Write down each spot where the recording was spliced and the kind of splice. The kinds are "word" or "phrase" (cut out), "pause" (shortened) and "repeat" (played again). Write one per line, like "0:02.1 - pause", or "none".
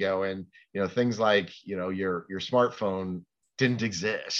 none